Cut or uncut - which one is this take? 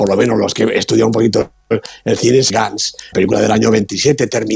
cut